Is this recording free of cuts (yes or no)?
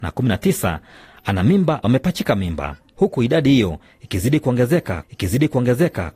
no